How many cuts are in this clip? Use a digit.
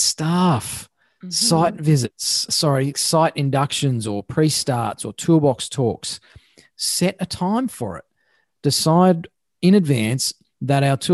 2